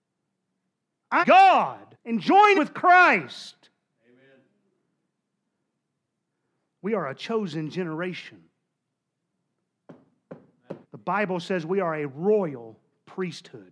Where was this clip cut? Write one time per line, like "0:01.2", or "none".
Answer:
0:01.2
0:01.9
0:02.5
0:10.8